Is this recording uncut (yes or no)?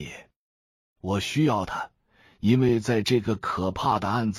yes